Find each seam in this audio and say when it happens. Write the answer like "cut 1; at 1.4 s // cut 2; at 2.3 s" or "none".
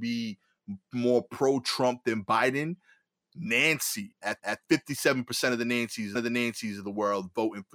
cut 1; at 4.4 s // cut 2; at 6.2 s